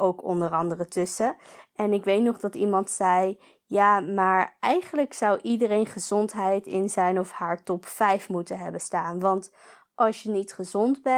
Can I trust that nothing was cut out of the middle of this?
yes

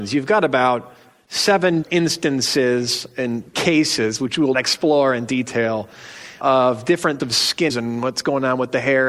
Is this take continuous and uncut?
no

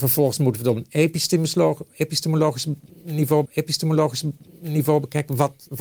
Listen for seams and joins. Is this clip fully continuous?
no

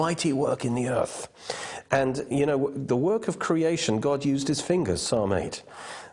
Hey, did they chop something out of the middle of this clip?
no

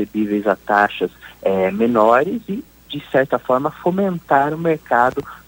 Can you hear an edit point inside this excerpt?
no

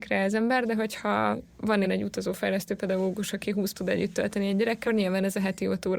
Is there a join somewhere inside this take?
yes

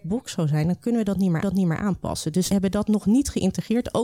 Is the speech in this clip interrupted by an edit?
yes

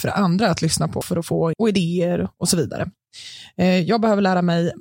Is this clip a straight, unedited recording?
no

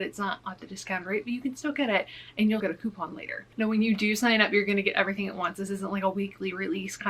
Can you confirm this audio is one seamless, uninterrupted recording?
no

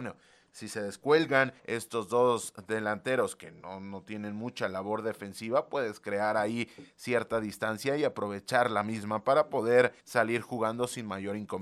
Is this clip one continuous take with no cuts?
no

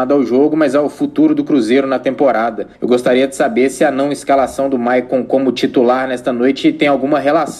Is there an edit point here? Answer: yes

